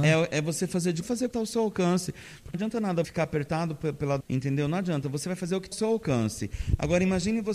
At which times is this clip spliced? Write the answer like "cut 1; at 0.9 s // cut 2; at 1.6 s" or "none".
cut 1; at 1.0 s // cut 2; at 1.3 s // cut 3; at 2.5 s // cut 4; at 3.0 s // cut 5; at 4.2 s // cut 6; at 5.7 s